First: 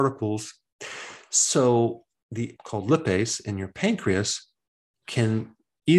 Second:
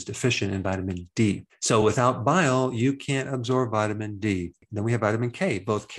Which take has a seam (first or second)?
first